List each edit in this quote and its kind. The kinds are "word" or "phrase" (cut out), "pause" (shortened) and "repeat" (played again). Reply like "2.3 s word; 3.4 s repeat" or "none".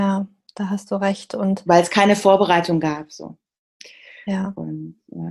none